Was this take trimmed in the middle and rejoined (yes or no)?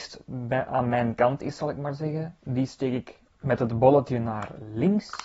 no